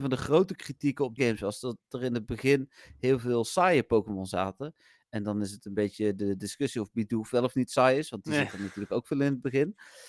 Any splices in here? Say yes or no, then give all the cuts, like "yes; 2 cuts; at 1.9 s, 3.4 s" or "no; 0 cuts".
yes; 1 cut; at 1.2 s